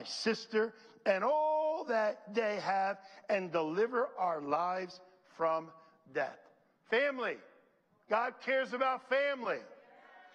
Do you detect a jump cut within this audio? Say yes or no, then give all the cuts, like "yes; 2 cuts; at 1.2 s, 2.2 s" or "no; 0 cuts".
no; 0 cuts